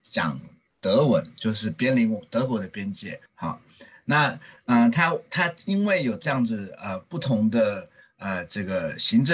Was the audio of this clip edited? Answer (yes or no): yes